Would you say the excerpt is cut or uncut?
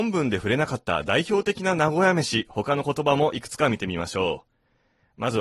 uncut